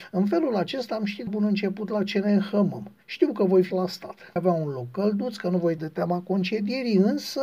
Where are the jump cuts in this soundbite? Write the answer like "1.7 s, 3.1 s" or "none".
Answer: 1.3 s, 3.0 s, 3.7 s, 4.4 s, 5.8 s